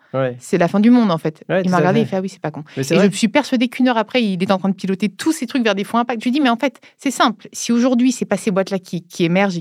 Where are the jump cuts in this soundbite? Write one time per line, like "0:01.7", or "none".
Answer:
none